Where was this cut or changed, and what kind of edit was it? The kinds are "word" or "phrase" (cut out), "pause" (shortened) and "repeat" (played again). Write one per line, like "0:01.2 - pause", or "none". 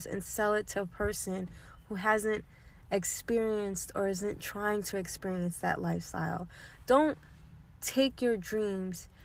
none